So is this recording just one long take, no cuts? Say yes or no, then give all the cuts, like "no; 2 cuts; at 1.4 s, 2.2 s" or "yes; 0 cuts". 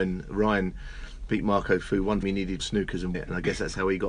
no; 3 cuts; at 2.2 s, 2.6 s, 3.1 s